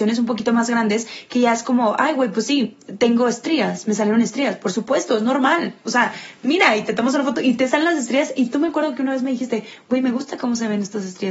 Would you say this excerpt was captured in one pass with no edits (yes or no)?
yes